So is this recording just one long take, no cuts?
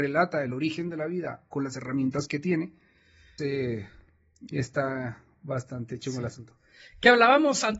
no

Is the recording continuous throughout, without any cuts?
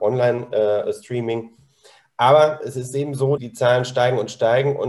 no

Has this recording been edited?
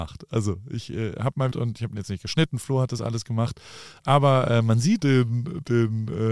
yes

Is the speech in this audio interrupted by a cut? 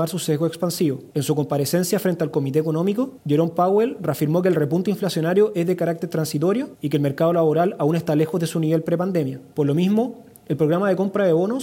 no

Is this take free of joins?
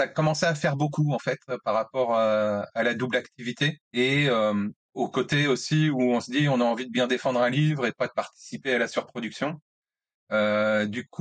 no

